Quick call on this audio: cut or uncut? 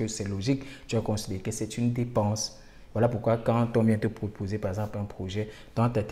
uncut